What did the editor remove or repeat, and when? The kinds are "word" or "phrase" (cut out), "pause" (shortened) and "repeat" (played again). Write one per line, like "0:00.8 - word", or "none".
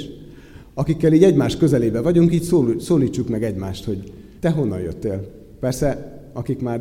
0:04.4 - pause